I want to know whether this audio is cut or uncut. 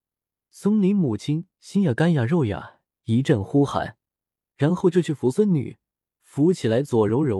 uncut